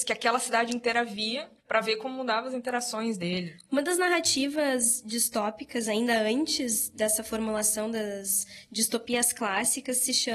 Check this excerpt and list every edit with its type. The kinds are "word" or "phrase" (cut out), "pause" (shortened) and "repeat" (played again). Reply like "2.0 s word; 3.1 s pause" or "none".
1.6 s pause